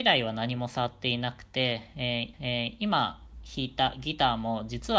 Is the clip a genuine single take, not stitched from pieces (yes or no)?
no